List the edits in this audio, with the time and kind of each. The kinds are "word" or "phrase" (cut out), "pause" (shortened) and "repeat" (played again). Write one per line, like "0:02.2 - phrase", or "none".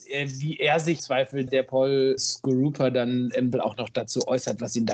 0:01.0 - word
0:01.5 - word
0:02.2 - word
0:03.5 - word